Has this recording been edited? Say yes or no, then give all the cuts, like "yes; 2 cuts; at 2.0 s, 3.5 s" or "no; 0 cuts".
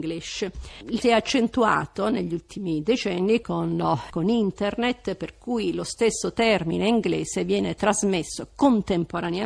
yes; 3 cuts; at 1.0 s, 3.4 s, 4.1 s